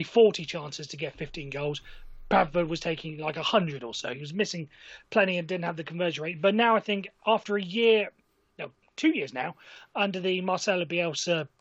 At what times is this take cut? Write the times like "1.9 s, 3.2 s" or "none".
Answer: none